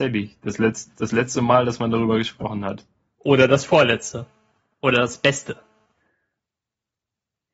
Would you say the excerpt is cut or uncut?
uncut